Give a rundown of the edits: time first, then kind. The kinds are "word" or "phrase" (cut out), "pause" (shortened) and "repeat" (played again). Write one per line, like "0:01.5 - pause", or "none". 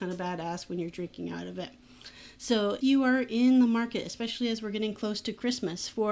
0:02.8 - word